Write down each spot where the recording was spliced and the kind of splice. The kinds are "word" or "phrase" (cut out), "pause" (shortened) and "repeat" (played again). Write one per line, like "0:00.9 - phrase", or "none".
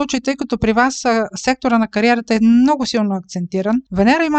none